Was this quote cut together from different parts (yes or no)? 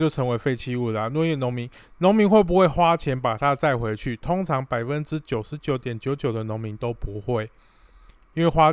no